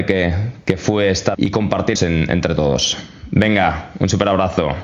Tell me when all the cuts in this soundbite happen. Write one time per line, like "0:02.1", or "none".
0:01.3
0:02.0